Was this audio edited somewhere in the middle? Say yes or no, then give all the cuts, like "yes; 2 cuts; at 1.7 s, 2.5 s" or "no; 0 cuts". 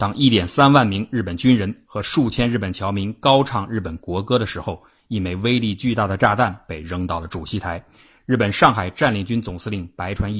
no; 0 cuts